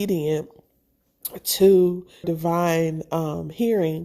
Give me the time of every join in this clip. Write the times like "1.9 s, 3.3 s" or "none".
2.2 s